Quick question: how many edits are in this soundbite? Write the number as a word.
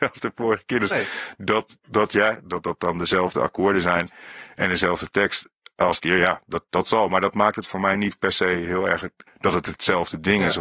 two